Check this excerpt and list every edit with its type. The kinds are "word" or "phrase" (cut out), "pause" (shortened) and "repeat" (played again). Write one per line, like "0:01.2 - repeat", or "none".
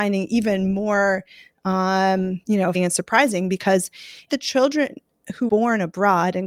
0:02.4 - pause
0:02.7 - word
0:04.3 - word
0:05.5 - word